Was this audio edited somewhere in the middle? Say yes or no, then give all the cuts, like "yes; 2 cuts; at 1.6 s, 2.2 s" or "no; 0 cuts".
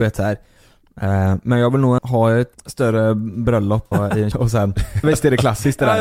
yes; 5 cuts; at 2.0 s, 2.5 s, 3.9 s, 4.3 s, 5.0 s